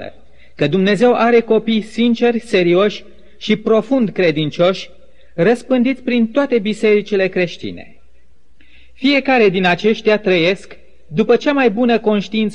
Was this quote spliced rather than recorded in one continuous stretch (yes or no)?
no